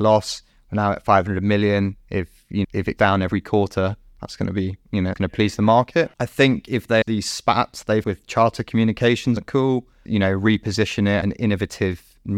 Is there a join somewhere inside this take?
yes; 8 cuts; at 2.6 s, 3.0 s, 5.1 s, 7.0 s, 8.0 s, 9.4 s, 10.1 s, 11.2 s

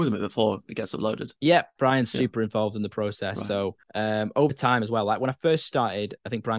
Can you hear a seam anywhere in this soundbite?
yes; 1 cut; at 3.8 s

